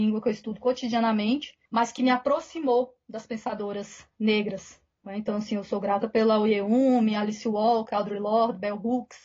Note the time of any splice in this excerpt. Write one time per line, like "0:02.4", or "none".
0:01.6